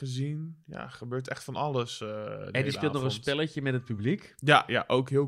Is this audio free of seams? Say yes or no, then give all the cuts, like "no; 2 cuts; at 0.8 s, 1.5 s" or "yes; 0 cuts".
yes; 0 cuts